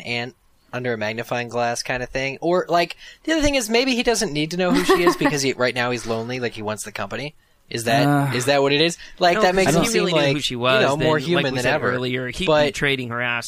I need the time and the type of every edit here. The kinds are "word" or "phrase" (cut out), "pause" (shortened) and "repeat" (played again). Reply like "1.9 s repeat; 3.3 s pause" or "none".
none